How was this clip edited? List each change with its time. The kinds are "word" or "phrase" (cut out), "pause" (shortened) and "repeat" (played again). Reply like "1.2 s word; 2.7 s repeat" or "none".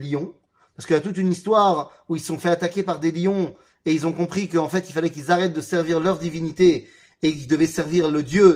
none